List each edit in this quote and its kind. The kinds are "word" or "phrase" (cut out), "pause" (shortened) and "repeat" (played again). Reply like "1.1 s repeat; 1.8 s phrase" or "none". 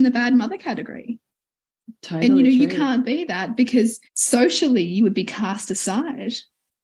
4.0 s pause